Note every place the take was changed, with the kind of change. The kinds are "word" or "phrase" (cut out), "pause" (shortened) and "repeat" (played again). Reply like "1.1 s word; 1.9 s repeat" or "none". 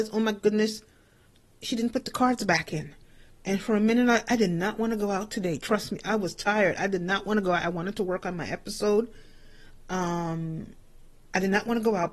none